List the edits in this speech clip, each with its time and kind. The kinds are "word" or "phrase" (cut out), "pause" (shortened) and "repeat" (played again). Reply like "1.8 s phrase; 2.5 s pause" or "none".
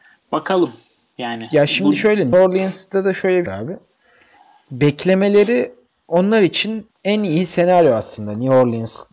2.3 s word; 3.5 s phrase; 6.9 s pause